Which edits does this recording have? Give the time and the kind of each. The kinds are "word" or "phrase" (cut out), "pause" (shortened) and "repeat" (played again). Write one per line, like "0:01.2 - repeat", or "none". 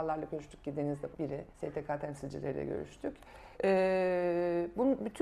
0:01.1 - word
0:01.5 - pause
0:03.5 - pause